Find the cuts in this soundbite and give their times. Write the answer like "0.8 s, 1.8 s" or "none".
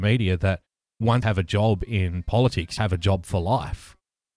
1.2 s, 2.8 s